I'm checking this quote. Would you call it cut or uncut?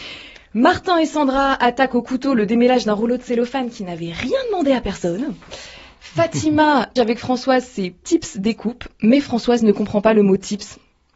cut